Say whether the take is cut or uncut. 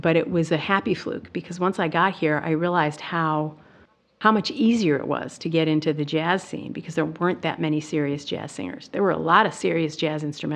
uncut